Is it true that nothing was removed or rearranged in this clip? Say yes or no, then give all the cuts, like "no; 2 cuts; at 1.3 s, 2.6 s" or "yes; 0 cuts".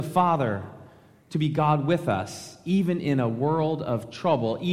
yes; 0 cuts